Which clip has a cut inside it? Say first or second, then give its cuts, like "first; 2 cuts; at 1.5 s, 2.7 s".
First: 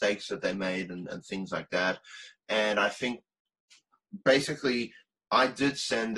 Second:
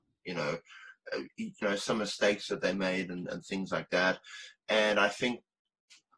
second; 1 cut; at 1.6 s